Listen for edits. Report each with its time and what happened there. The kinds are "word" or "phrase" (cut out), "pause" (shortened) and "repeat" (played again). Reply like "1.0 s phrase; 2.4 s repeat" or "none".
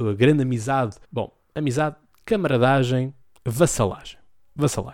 1.0 s pause; 3.2 s pause